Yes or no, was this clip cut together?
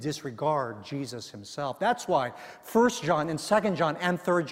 no